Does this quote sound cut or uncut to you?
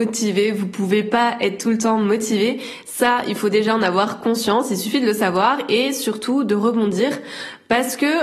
uncut